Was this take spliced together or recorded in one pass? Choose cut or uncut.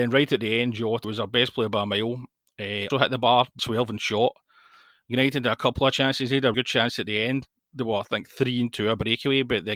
cut